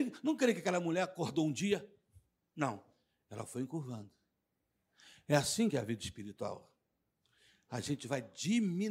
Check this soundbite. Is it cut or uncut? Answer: uncut